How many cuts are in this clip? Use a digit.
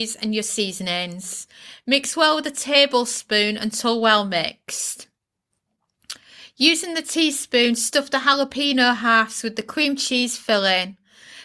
0